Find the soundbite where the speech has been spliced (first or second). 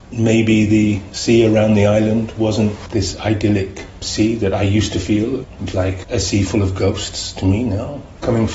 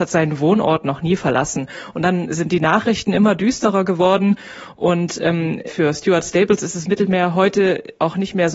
first